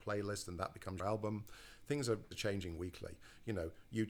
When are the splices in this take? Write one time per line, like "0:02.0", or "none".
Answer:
0:01.0
0:02.3